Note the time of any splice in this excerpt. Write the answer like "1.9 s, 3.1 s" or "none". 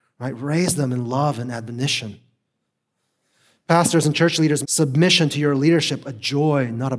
4.6 s